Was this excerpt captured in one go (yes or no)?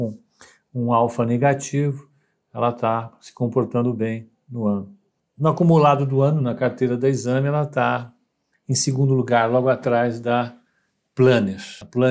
yes